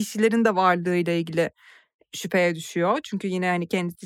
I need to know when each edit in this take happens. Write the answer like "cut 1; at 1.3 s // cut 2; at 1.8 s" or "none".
none